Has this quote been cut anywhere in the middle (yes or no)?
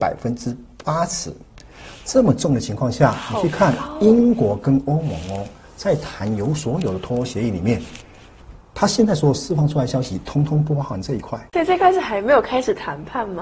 yes